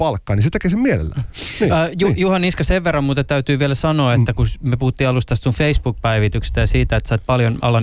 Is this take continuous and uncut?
yes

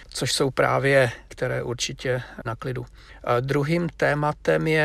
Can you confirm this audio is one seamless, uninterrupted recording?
no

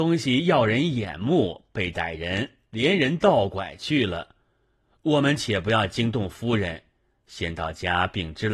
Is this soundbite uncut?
yes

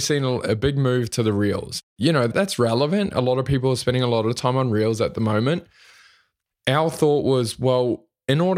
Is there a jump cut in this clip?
no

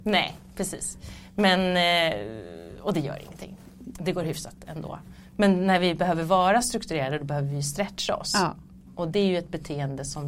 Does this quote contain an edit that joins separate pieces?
no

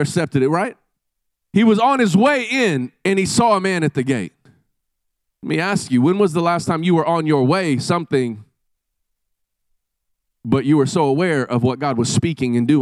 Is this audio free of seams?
yes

